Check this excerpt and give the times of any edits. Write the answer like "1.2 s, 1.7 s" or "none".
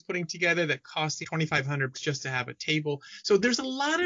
1.2 s, 1.9 s